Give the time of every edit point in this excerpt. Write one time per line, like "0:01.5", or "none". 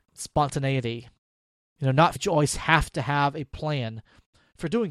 0:02.2